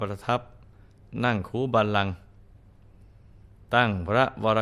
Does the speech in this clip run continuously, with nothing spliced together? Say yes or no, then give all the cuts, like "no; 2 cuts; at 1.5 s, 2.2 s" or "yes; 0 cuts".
yes; 0 cuts